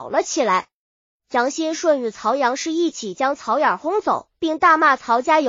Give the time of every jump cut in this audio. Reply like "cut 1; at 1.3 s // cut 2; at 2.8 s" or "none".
cut 1; at 4.3 s